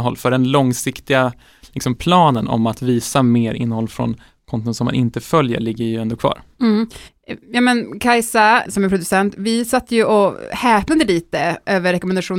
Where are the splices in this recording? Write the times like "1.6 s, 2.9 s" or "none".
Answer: 8.7 s